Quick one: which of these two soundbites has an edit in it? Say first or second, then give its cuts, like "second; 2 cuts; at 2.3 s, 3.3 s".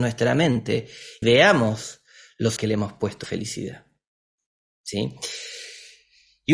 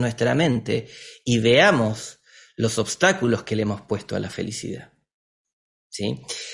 first; 3 cuts; at 1.2 s, 2.6 s, 3.2 s